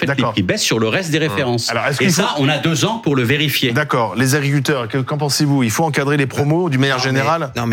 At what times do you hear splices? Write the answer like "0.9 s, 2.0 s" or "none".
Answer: none